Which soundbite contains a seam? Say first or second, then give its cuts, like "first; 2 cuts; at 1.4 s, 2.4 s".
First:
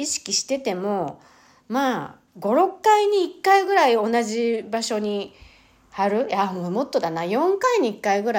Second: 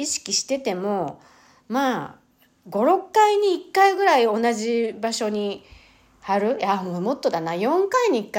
first; 1 cut; at 2.3 s